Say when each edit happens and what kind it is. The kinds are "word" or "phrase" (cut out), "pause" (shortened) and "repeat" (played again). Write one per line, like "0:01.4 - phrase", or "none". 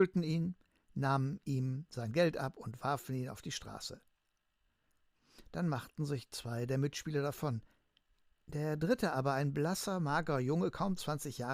none